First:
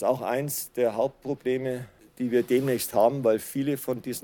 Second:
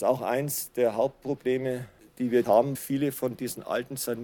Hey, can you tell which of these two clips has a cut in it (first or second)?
second